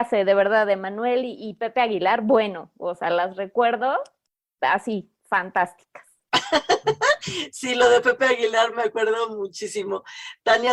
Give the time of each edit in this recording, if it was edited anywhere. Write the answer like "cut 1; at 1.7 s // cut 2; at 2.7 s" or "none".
none